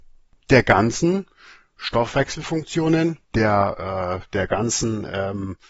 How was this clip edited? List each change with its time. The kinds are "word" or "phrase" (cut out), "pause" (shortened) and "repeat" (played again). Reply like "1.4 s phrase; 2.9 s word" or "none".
3.2 s pause